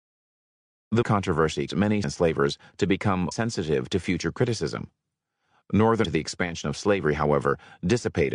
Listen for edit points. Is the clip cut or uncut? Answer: cut